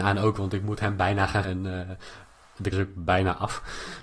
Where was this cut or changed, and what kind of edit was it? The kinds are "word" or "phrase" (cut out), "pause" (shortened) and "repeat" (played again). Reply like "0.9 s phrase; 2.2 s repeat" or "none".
1.4 s word; 2.7 s word